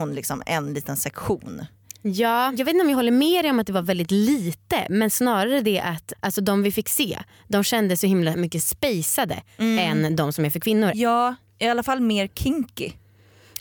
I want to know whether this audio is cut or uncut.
cut